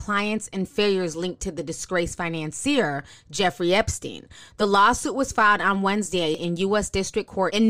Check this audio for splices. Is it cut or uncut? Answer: uncut